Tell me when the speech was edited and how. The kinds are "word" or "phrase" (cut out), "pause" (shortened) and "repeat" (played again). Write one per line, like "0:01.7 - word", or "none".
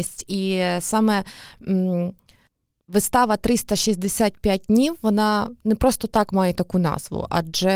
none